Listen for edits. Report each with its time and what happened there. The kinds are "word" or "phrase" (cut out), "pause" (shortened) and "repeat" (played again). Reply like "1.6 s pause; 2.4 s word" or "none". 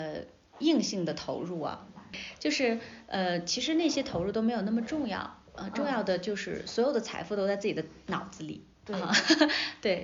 none